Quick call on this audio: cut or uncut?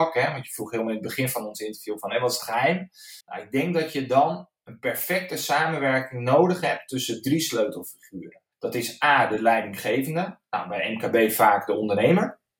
cut